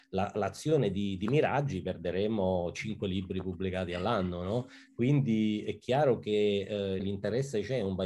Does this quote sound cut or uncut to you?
cut